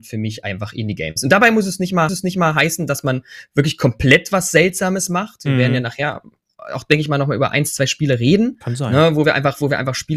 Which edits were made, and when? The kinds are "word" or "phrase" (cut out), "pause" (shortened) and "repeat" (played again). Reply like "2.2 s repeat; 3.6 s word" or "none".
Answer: 2.1 s repeat; 9.2 s phrase